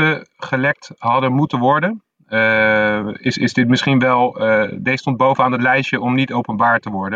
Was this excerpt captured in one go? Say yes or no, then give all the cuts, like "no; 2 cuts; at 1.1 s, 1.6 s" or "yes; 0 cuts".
yes; 0 cuts